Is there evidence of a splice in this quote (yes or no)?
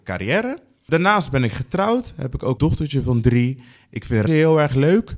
yes